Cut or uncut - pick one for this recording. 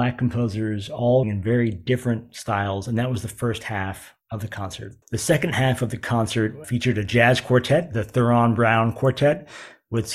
cut